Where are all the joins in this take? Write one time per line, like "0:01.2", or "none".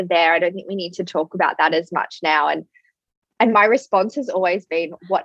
none